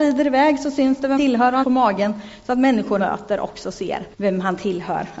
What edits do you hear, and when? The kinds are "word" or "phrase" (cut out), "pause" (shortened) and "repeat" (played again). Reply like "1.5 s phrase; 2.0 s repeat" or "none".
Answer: 1.2 s word; 1.6 s phrase; 3.0 s word; 4.1 s pause